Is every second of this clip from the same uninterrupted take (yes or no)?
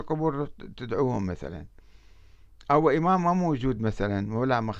yes